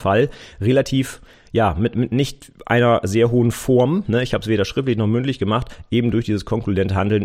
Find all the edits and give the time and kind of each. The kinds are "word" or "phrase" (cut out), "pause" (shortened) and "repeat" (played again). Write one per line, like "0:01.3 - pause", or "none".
none